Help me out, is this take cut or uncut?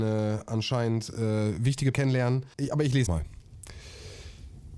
cut